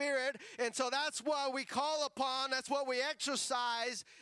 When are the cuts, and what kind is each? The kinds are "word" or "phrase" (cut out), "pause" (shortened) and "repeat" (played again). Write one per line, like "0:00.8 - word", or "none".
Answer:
none